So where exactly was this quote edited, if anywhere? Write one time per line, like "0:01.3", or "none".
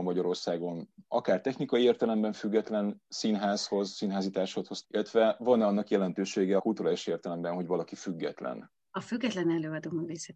0:01.0
0:04.8
0:06.6